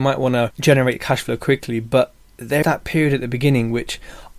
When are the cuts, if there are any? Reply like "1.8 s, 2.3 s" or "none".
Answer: 2.6 s